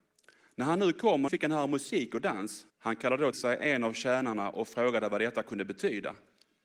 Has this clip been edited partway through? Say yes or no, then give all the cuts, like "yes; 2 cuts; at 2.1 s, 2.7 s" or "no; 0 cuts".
yes; 3 cuts; at 1.3 s, 2.7 s, 3.3 s